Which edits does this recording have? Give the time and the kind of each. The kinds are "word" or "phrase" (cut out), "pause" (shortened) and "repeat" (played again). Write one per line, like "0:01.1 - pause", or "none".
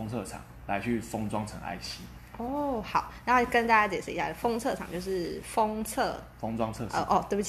none